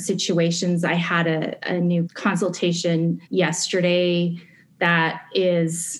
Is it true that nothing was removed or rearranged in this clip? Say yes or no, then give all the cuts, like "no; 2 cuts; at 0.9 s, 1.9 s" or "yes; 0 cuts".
no; 2 cuts; at 2.1 s, 3.3 s